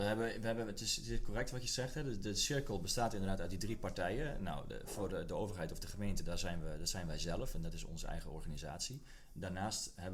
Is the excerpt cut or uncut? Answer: uncut